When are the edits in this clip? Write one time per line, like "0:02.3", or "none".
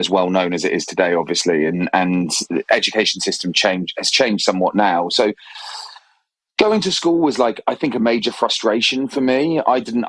none